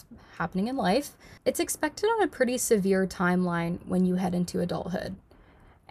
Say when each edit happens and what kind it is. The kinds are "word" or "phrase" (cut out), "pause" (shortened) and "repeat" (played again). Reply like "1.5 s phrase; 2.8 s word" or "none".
none